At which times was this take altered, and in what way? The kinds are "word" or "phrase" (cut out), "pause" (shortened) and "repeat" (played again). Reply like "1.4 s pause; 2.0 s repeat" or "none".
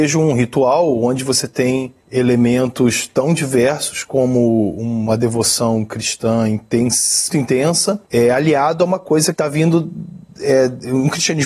2.0 s pause; 7.3 s word; 8.1 s pause; 9.3 s phrase